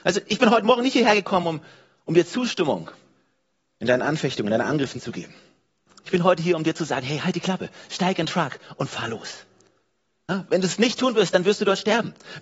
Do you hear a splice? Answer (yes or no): no